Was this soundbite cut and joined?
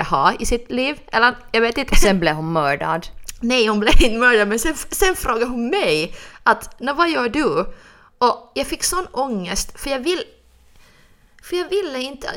no; 0 cuts

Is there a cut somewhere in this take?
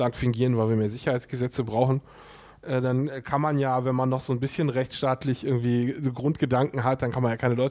no; 0 cuts

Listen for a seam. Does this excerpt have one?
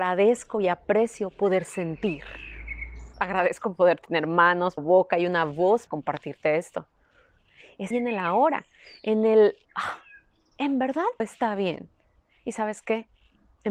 yes; 6 cuts; at 3.1 s, 4.8 s, 5.9 s, 7.9 s, 9.6 s, 11.2 s

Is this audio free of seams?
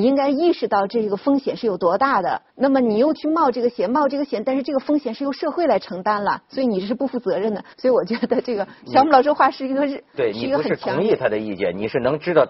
no; 2 cuts; at 2.5 s, 7.7 s

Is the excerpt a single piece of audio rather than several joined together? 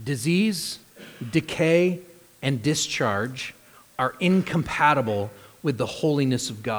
yes; 0 cuts

